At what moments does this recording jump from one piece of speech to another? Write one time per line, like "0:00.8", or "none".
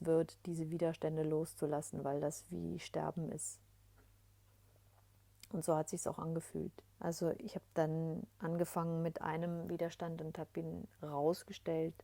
0:06.9
0:08.3